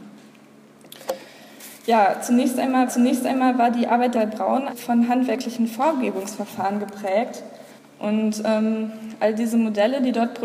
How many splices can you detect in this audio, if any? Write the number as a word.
four